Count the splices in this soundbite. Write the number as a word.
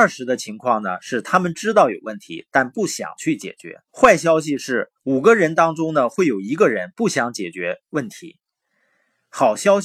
two